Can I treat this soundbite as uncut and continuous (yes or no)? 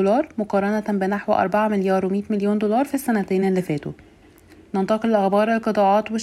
yes